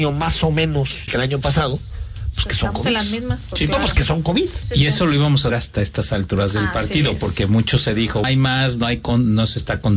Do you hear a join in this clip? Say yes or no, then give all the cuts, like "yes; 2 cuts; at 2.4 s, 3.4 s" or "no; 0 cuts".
yes; 4 cuts; at 1.1 s, 4.6 s, 5.5 s, 8.2 s